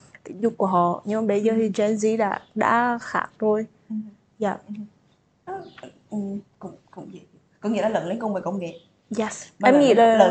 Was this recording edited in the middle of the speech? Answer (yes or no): no